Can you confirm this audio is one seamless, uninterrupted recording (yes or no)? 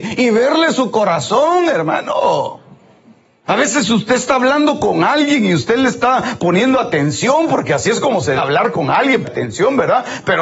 no